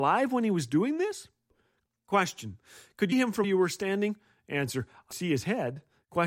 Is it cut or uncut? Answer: cut